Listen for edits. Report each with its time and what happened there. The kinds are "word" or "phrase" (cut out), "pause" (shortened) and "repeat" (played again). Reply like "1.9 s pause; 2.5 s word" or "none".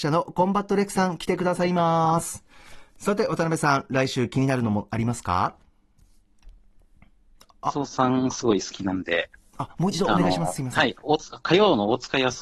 none